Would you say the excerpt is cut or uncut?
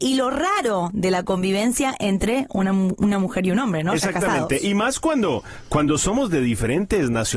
uncut